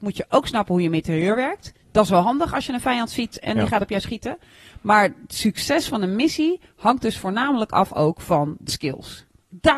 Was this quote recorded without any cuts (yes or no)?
no